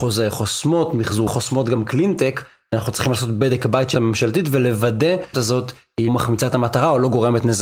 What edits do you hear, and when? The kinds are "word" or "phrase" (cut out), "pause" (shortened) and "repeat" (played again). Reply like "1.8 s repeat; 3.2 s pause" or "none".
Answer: 1.3 s word; 3.9 s word; 5.3 s word; 6.1 s word

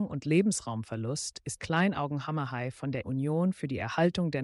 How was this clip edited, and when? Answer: 1.6 s word; 3.0 s word

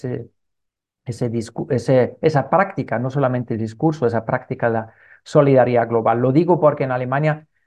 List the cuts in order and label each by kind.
none

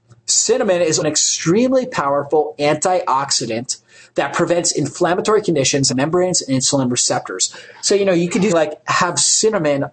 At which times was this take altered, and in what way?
1.0 s word; 5.9 s phrase; 8.5 s word

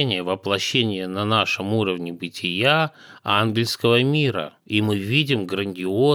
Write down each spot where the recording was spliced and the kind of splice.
4.6 s pause

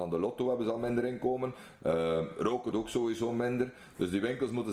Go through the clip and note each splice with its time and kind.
2.7 s word

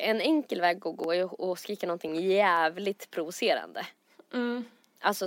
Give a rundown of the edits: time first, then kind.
none

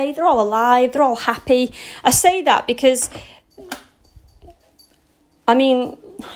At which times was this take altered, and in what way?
none

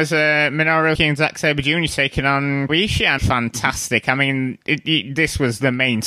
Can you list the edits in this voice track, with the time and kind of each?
1.0 s word; 2.7 s phrase; 3.2 s phrase

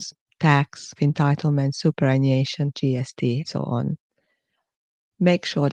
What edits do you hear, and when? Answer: 1.0 s word; 2.7 s word; 3.4 s word

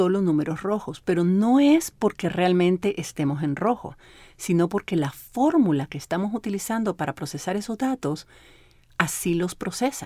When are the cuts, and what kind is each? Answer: none

